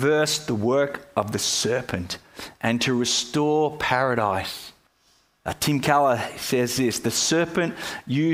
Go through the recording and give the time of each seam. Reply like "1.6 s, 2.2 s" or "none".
4.9 s